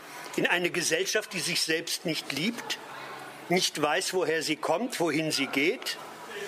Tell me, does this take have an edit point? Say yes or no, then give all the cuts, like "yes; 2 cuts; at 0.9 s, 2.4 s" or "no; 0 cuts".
no; 0 cuts